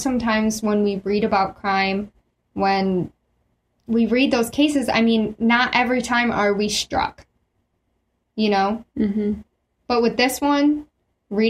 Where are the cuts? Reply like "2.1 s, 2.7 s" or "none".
none